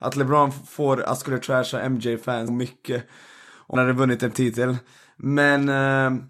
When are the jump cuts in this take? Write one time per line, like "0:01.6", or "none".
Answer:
0:01.2
0:02.5
0:03.7
0:04.3